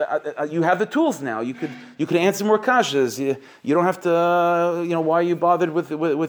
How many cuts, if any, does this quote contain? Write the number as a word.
zero